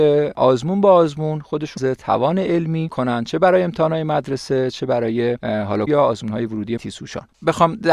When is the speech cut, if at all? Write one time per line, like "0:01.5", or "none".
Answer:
0:01.8
0:02.9
0:05.9
0:06.8